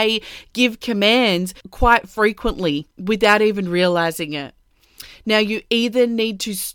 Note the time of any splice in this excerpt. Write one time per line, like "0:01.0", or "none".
0:01.6
0:02.9